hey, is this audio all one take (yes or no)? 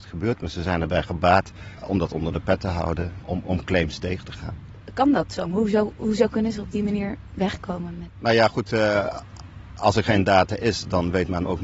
no